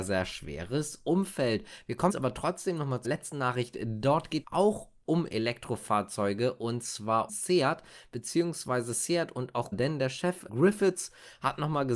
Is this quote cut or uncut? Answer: cut